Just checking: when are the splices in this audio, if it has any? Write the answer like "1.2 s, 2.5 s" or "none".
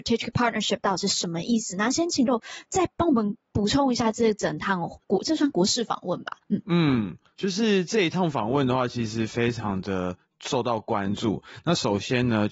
2.3 s, 3.4 s, 6.4 s, 7.4 s